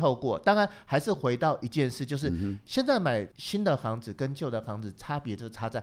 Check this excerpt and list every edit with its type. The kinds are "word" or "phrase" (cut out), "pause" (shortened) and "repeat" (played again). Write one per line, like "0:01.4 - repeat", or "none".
0:03.3 - pause